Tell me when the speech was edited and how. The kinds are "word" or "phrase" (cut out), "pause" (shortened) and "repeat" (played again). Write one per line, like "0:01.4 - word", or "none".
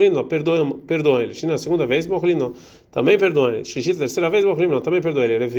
none